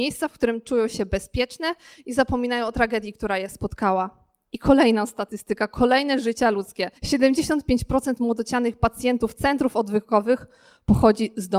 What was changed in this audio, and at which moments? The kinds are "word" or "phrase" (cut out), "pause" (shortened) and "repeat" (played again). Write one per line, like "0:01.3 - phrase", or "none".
0:07.0 - pause